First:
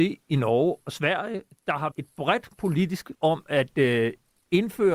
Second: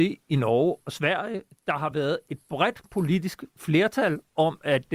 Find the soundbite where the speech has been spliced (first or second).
first